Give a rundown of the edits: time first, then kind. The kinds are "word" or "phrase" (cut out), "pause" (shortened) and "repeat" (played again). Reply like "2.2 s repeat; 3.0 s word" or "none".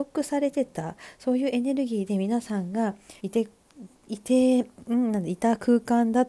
3.2 s pause